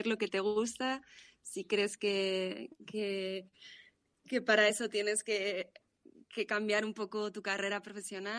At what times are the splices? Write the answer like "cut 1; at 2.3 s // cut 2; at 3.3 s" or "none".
none